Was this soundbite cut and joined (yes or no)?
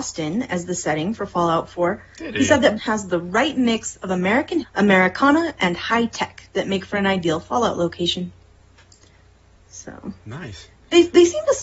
yes